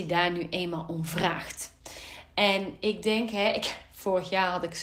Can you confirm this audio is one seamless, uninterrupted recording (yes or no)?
yes